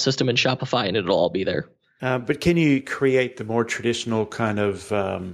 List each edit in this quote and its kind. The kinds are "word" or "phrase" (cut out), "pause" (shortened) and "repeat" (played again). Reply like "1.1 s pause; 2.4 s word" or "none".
none